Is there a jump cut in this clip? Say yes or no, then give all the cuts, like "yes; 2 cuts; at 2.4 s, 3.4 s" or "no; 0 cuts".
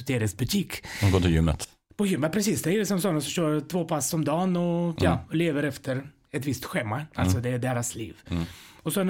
no; 0 cuts